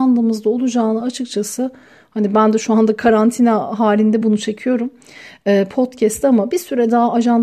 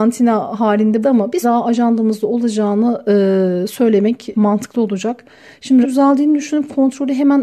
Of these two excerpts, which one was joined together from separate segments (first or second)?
second